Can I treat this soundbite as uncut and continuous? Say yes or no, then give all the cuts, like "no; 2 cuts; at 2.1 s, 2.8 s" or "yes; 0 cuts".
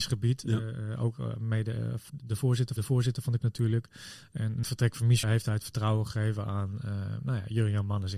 no; 5 cuts; at 2.1 s, 2.8 s, 3.4 s, 4.6 s, 5.2 s